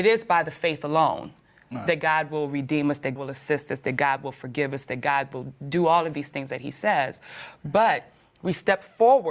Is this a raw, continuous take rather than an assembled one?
no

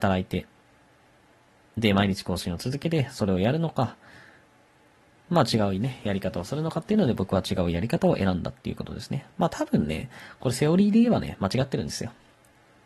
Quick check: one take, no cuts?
yes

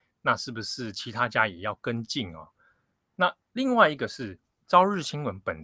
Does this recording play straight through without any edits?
yes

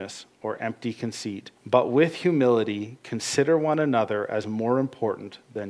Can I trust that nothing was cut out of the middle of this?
no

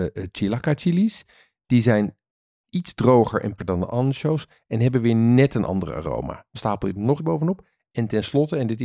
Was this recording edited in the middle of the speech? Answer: yes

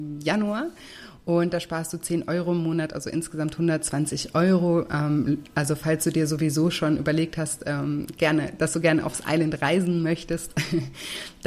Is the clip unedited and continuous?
yes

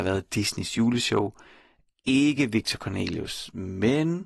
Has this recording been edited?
no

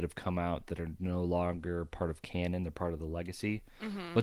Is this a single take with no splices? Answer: yes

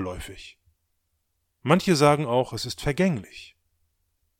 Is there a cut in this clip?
no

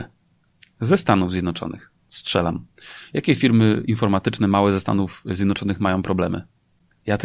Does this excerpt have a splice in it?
yes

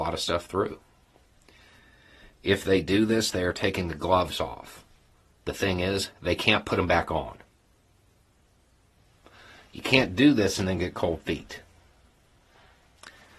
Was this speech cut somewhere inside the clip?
no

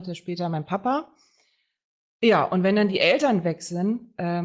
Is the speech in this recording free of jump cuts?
yes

